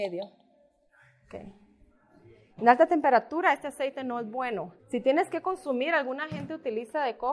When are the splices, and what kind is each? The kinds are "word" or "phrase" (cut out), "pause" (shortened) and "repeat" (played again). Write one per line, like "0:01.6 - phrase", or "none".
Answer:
0:04.8 - pause